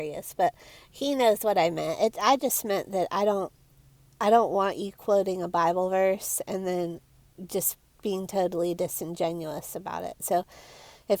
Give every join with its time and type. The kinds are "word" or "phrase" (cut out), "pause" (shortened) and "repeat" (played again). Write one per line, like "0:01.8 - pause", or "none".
none